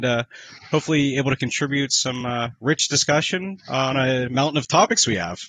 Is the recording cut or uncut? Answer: uncut